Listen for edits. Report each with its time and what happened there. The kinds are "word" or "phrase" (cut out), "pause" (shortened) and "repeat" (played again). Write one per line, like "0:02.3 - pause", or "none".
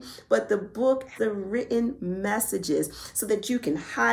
0:01.2 - word